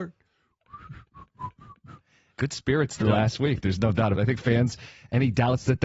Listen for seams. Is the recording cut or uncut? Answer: cut